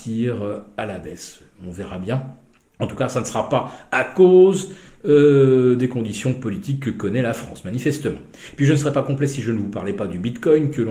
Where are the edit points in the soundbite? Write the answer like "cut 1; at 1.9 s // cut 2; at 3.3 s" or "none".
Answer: none